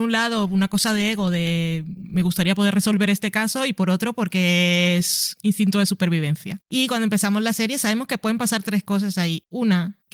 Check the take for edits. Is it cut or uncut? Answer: uncut